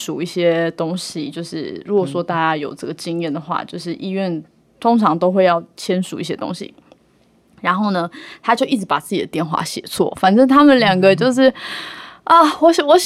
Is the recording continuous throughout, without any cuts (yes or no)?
yes